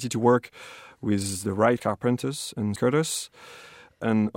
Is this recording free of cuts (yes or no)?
no